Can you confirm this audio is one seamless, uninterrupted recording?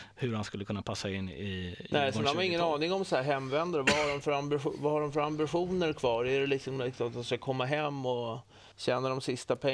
no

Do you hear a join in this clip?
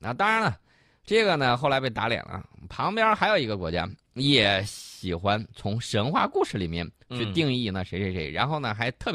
no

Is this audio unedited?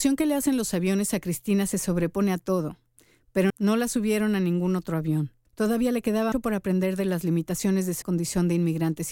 no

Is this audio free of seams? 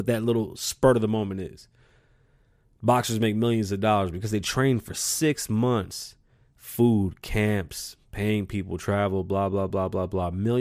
yes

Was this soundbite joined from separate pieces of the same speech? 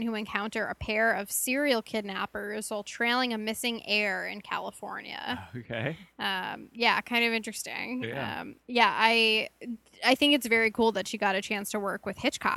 no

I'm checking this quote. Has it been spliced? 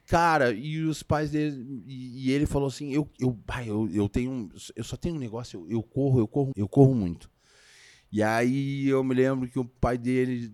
yes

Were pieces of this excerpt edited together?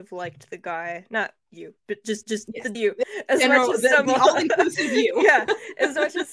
yes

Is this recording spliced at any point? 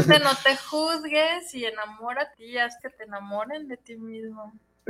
yes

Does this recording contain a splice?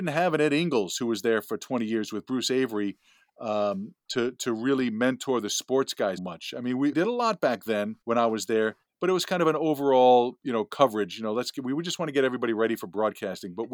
yes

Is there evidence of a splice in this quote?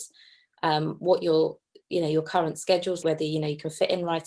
yes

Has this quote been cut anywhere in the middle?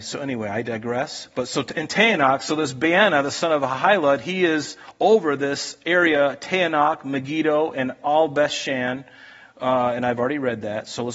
no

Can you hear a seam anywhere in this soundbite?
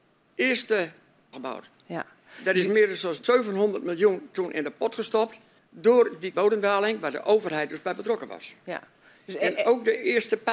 yes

